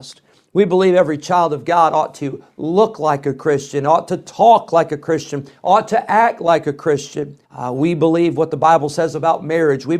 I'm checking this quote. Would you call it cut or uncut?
cut